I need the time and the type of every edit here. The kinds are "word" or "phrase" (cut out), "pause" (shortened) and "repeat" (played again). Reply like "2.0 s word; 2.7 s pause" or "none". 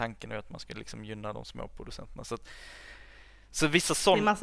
none